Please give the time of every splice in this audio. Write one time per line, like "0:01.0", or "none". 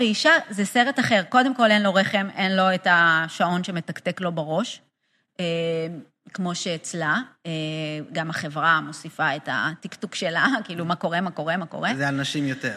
none